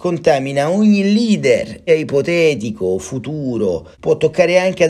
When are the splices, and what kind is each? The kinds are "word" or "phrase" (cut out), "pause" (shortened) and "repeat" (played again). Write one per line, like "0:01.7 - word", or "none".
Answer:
0:01.9 - word
0:03.9 - pause